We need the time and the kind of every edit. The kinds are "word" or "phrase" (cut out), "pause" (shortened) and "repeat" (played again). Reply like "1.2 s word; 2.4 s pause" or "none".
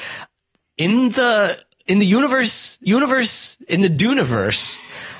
2.9 s repeat